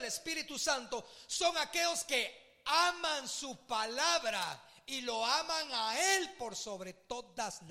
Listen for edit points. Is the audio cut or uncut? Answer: uncut